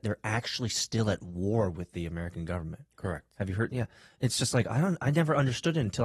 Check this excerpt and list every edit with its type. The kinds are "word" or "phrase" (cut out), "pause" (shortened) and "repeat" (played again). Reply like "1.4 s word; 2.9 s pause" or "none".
none